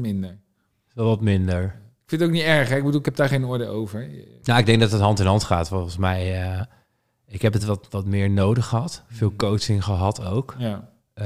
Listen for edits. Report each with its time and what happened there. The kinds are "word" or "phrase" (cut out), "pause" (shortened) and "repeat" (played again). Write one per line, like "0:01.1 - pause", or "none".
none